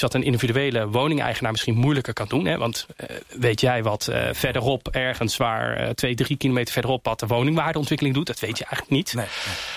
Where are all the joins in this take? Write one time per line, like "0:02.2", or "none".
none